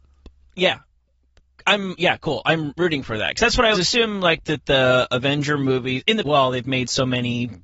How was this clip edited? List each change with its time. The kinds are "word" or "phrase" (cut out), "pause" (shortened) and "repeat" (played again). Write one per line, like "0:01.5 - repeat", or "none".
0:02.0 - word
0:02.8 - word
0:03.7 - word
0:04.4 - phrase
0:06.2 - phrase